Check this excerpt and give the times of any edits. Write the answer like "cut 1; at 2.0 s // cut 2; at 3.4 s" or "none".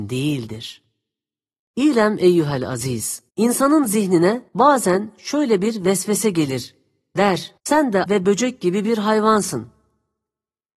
cut 1; at 3.3 s // cut 2; at 4.5 s // cut 3; at 7.6 s // cut 4; at 8.1 s